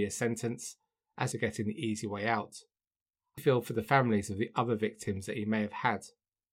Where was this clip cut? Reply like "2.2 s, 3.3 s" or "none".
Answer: 1.3 s, 3.4 s